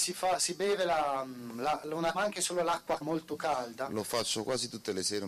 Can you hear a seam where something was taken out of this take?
yes; 2 cuts; at 2.1 s, 3.0 s

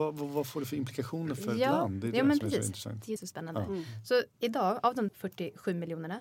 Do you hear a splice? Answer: yes; 3 cuts; at 3.2 s, 4.3 s, 5.1 s

